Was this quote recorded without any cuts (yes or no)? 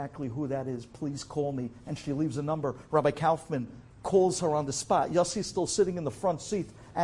yes